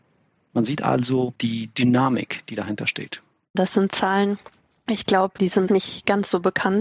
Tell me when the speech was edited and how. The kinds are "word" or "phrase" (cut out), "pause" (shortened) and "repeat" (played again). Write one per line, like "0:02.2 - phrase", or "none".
0:05.7 - word